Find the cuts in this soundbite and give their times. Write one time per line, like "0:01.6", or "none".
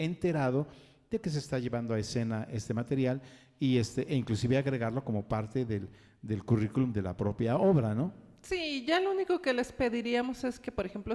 none